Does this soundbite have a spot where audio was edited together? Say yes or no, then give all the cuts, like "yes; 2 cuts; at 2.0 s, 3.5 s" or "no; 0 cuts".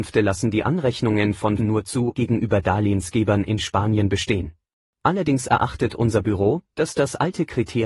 yes; 3 cuts; at 1.6 s, 2.1 s, 4.9 s